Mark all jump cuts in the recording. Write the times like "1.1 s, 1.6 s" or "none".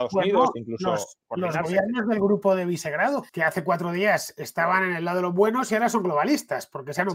3.3 s